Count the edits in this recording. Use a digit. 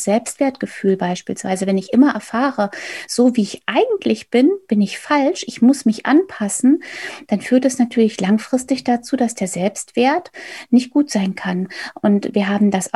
0